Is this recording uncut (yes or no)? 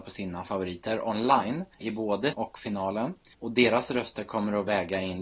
no